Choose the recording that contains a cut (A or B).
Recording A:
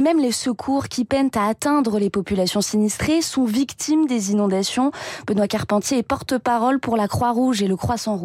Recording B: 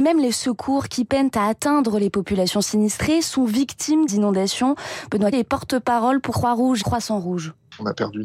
B